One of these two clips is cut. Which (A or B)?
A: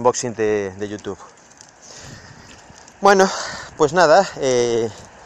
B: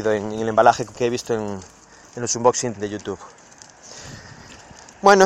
B